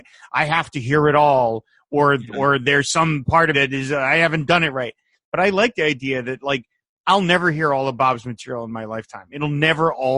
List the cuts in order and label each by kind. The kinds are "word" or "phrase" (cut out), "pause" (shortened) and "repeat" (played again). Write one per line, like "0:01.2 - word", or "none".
0:03.5 - word